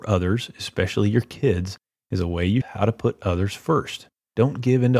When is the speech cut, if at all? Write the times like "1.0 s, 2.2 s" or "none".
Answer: 2.6 s